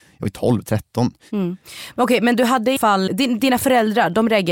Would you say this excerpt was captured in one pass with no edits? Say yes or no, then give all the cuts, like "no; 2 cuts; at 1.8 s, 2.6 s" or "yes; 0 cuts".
no; 2 cuts; at 2.8 s, 3.1 s